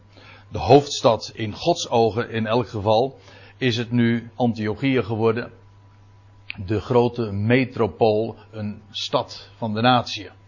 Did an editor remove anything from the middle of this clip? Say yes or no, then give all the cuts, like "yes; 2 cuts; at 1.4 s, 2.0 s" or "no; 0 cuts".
no; 0 cuts